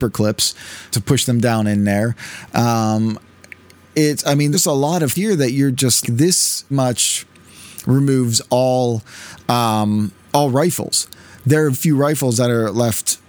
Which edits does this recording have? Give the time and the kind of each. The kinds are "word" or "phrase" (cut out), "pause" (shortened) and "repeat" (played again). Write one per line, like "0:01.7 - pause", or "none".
0:00.9 - word
0:04.5 - word
0:05.1 - word
0:06.0 - word
0:06.7 - word
0:11.7 - word